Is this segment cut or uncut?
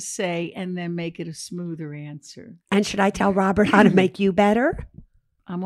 cut